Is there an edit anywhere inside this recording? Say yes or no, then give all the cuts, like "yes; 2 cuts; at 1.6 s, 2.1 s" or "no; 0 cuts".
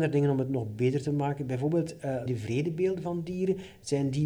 yes; 1 cut; at 2.3 s